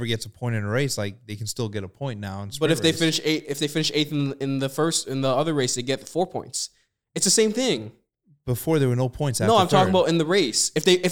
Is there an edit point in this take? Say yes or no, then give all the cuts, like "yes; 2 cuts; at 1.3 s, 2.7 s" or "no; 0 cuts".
no; 0 cuts